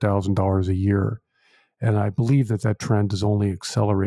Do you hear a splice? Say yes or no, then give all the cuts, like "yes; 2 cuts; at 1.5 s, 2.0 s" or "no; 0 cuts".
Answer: no; 0 cuts